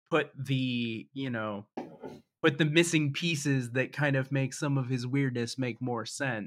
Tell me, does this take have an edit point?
no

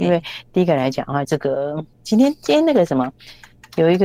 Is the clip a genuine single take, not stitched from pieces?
no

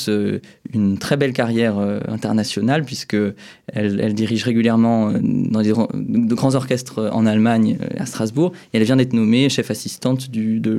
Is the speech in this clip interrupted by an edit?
no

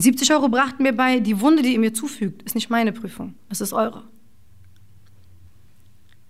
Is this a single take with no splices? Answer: no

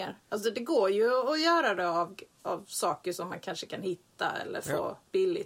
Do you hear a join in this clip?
no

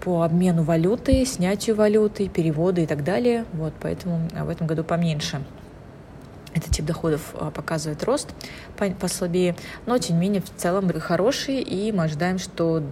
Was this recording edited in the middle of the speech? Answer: yes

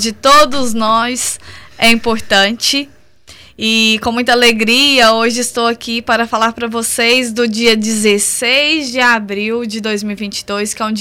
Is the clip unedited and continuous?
yes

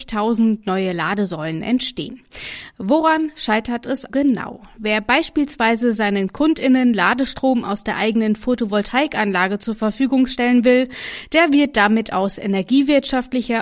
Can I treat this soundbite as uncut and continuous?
no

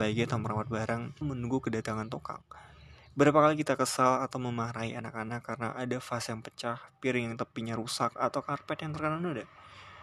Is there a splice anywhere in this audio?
yes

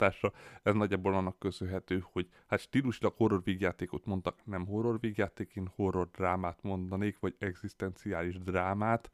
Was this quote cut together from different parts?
no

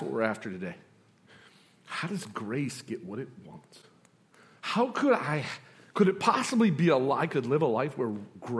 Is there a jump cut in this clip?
no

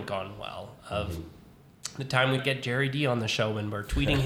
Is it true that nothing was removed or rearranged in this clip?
no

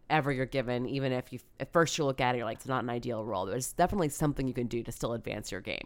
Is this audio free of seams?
no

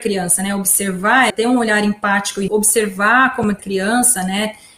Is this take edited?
yes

